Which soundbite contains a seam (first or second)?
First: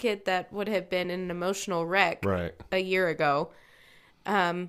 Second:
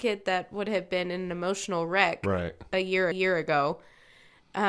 second